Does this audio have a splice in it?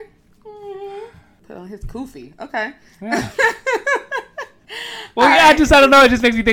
no; 0 cuts

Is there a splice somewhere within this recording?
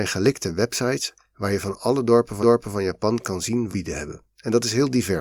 yes; 3 cuts; at 2.4 s, 3.7 s, 4.3 s

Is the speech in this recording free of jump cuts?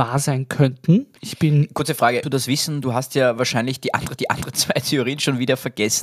no; 3 cuts; at 1.2 s, 2.2 s, 4.2 s

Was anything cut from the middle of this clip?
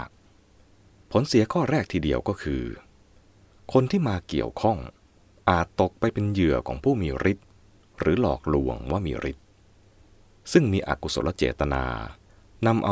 no; 0 cuts

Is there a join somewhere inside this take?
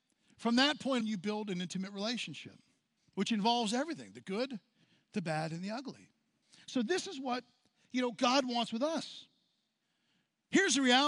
yes; 3 cuts; at 1.0 s, 3.0 s, 6.4 s

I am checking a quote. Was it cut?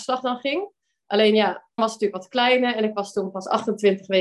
yes; 1 cut; at 1.8 s

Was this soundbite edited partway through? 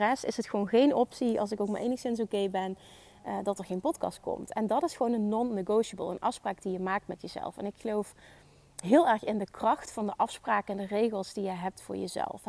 no; 0 cuts

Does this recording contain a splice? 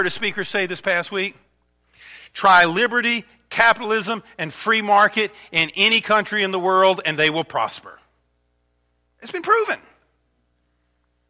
no; 0 cuts

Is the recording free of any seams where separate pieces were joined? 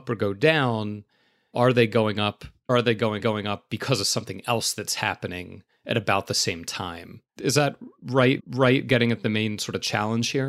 no; 4 cuts; at 2.7 s, 3.2 s, 7.3 s, 8.4 s

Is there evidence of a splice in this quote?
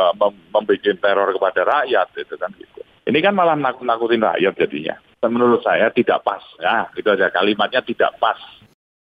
no; 0 cuts

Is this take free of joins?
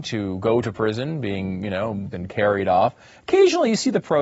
no; 1 cut; at 2.1 s

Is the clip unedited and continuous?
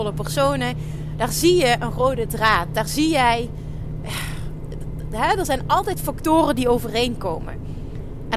yes; 0 cuts

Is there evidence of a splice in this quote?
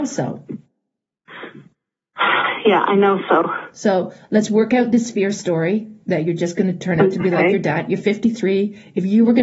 no; 0 cuts

